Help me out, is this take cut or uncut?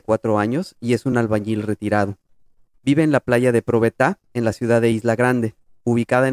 uncut